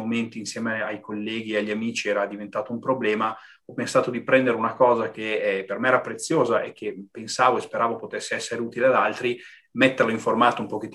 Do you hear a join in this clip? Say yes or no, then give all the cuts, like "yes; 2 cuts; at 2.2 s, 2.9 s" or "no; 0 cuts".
no; 0 cuts